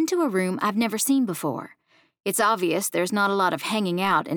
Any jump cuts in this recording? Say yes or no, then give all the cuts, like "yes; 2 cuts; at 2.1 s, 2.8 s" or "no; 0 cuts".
no; 0 cuts